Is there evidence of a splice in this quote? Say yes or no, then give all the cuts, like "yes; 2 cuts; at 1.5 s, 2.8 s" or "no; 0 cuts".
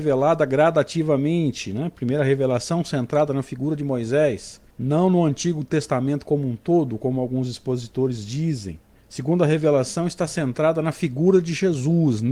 yes; 2 cuts; at 4.7 s, 9.0 s